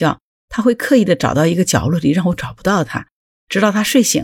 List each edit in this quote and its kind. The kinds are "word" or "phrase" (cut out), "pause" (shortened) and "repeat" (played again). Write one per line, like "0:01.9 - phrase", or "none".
none